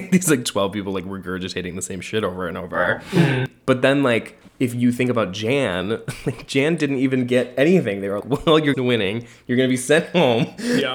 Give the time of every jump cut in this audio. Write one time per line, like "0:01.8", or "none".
0:04.5
0:08.2
0:08.7